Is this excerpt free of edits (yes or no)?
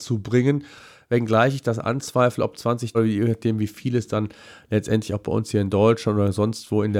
no